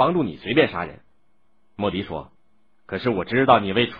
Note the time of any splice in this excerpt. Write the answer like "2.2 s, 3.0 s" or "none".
1.1 s, 2.4 s